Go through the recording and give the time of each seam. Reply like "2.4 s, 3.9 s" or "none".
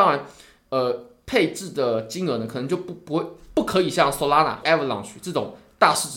4.6 s

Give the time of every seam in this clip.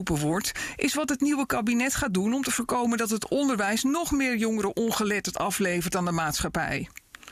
none

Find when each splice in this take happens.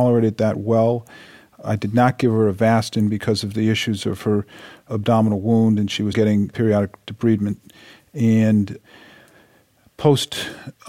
6.1 s

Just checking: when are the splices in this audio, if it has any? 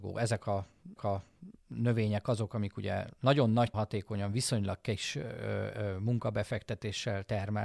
1.0 s, 3.7 s

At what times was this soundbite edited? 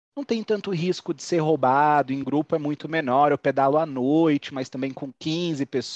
none

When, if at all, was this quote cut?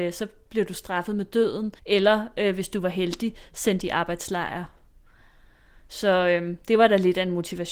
1.8 s

